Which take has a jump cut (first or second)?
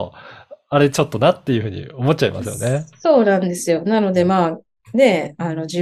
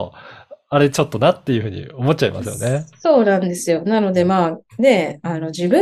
second